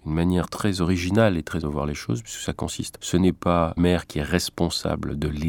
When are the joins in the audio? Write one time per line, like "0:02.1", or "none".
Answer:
0:01.6
0:03.0
0:03.8

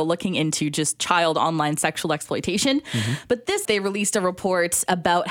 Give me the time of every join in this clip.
0:03.6

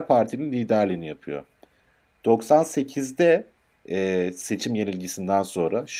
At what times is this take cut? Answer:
none

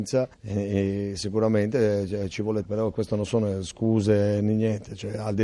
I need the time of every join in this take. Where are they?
0:02.6

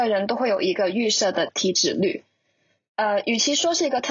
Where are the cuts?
none

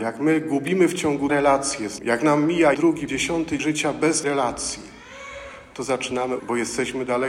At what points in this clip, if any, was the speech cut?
0:01.3
0:02.0
0:02.7
0:03.1
0:03.6
0:04.2
0:06.4

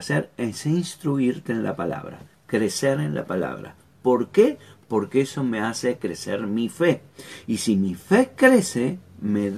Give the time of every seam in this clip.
none

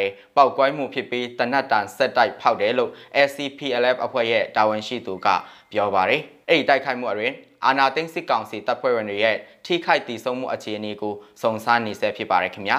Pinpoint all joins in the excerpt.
none

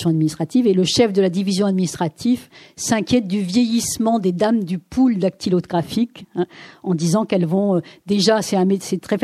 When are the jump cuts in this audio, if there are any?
none

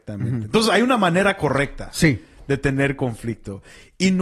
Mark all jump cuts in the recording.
none

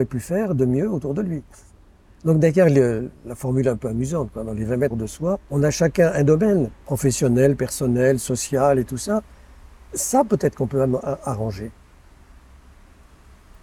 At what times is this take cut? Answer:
0:01.7
0:04.9
0:05.4
0:06.7

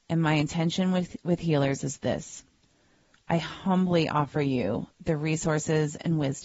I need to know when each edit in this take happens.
none

